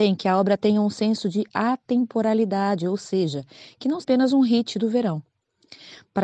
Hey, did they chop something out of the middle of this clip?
yes; 1 cut; at 4.0 s

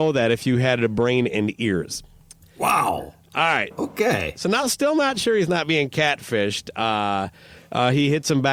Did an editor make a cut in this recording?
no; 0 cuts

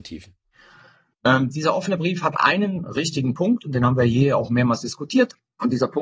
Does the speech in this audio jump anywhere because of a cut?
no; 0 cuts

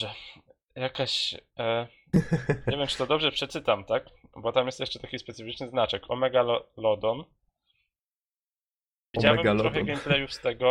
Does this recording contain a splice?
no; 0 cuts

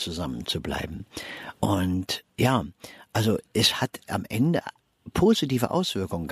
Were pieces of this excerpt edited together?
yes; 1 cut; at 1.6 s

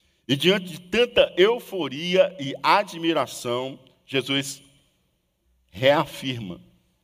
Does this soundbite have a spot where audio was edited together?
no; 0 cuts

